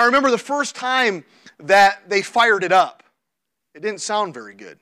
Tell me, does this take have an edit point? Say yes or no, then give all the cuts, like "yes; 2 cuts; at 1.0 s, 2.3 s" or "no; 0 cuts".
no; 0 cuts